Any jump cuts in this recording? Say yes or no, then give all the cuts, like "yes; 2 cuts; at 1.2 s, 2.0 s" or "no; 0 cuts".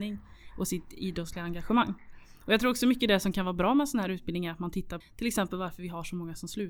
yes; 1 cut; at 5.0 s